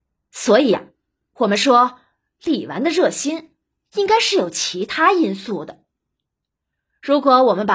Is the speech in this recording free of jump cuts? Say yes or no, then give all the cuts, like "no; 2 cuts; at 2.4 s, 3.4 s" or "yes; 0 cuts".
yes; 0 cuts